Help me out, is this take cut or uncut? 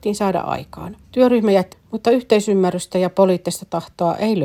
cut